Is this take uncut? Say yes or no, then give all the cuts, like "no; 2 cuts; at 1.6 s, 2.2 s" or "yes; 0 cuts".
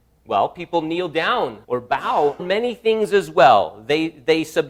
no; 2 cuts; at 1.6 s, 2.4 s